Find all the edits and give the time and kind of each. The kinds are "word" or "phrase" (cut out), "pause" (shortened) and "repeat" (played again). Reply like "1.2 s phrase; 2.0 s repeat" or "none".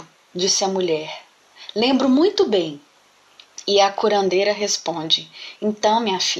none